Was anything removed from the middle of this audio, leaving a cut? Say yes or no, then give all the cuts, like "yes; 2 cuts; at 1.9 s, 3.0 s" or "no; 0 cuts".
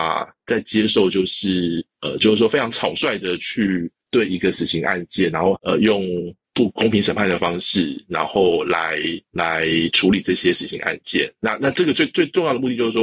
yes; 3 cuts; at 1.9 s, 4.0 s, 9.3 s